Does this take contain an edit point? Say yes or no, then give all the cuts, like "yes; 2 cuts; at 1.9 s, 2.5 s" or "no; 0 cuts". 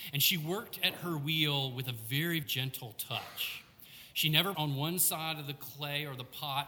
yes; 2 cuts; at 2.4 s, 4.5 s